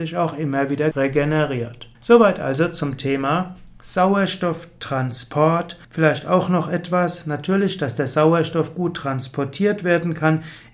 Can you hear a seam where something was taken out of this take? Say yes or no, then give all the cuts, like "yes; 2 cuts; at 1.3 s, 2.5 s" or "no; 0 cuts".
yes; 3 cuts; at 0.9 s, 1.9 s, 5.8 s